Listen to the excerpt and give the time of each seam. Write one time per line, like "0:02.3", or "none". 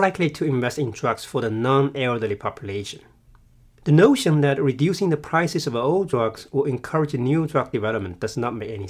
none